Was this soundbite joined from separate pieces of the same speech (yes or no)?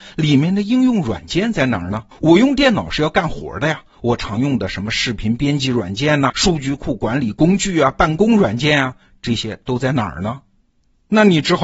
yes